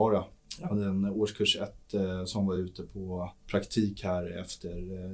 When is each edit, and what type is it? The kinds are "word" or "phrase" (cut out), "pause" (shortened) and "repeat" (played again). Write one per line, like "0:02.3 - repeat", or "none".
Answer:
none